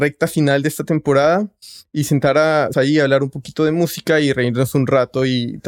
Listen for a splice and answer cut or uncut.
cut